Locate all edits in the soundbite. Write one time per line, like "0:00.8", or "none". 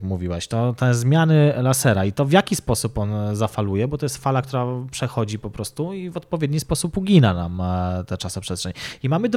none